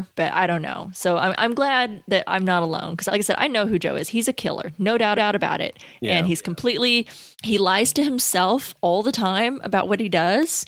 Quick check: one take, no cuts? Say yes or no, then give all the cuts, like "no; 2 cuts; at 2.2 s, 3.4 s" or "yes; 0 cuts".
no; 3 cuts; at 3.1 s, 5.2 s, 7.3 s